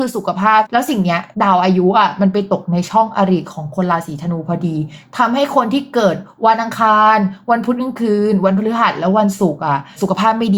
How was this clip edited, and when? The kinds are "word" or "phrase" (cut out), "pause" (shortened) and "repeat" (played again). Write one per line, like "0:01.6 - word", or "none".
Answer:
0:01.3 - pause